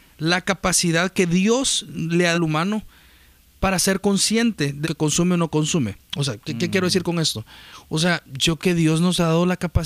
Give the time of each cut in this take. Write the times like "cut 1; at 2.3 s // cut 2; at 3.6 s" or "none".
cut 1; at 2.3 s // cut 2; at 4.8 s // cut 3; at 8.6 s

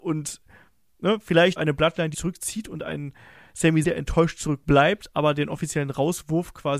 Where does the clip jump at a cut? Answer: cut 1; at 1.6 s // cut 2; at 2.1 s // cut 3; at 3.8 s

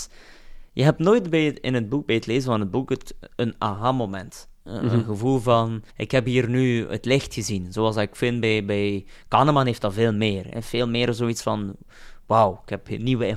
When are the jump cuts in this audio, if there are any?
cut 1; at 5.9 s

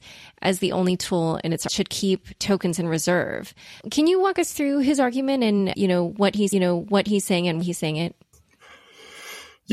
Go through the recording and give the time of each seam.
cut 1; at 1.7 s // cut 2; at 3.8 s // cut 3; at 5.7 s // cut 4; at 6.5 s // cut 5; at 7.6 s

